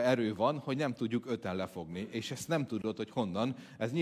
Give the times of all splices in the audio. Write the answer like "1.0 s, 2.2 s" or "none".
none